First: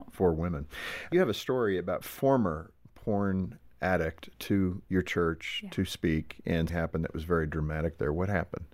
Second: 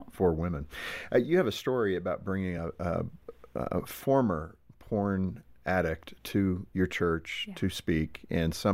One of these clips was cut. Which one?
first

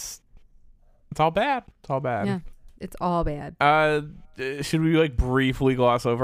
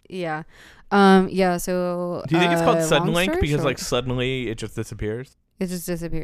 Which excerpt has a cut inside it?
first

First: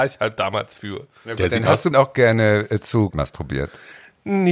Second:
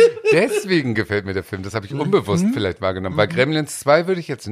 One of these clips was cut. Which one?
first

